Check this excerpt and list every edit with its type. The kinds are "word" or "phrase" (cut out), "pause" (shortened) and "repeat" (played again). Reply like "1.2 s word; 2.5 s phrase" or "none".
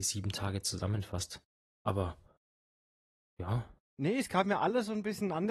none